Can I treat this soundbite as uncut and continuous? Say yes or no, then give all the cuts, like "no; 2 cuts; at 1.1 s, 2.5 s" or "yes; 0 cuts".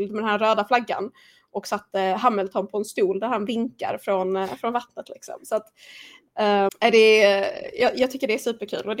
no; 1 cut; at 6.7 s